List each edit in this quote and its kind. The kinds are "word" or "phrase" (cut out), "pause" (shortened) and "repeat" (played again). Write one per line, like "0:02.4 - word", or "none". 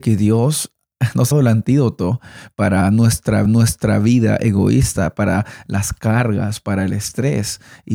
0:01.3 - word
0:03.5 - repeat

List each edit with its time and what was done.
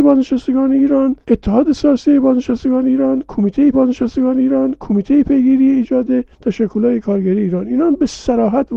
0:01.2 - pause
0:03.7 - repeat
0:06.3 - pause

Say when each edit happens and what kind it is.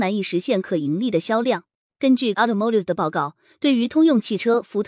0:02.3 - word

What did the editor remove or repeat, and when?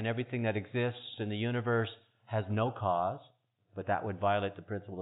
none

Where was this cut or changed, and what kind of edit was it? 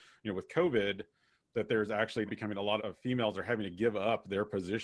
0:02.3 - word
0:02.8 - word

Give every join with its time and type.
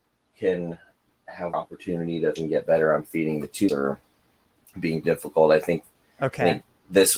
0:01.5 - word
0:02.4 - word
0:03.7 - word
0:05.0 - word

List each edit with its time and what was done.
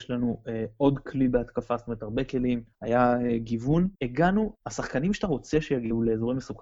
0:02.7 - pause
0:03.9 - pause

